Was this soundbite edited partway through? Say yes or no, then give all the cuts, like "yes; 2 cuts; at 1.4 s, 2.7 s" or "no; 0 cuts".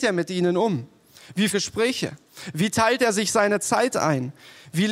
yes; 1 cut; at 1.5 s